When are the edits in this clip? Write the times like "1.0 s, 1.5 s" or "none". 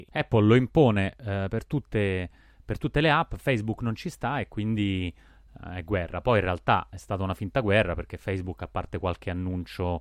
none